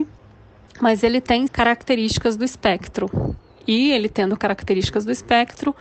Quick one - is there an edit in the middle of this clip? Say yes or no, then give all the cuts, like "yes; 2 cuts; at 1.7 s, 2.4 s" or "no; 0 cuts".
yes; 1 cut; at 1.5 s